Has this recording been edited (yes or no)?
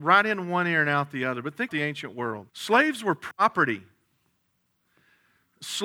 yes